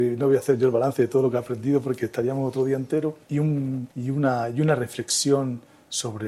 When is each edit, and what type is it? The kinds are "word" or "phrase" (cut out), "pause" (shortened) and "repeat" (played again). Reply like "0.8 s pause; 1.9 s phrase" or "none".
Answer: 3.2 s pause; 3.9 s pause